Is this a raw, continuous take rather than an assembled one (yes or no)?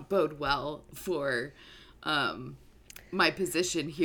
yes